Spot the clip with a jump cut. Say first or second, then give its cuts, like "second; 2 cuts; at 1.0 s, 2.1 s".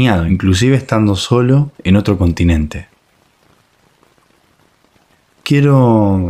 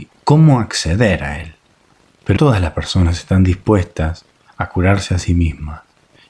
second; 1 cut; at 2.4 s